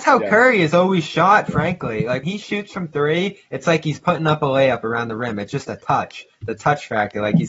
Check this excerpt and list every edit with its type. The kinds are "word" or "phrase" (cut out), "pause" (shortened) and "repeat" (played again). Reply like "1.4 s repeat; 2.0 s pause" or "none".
2.2 s word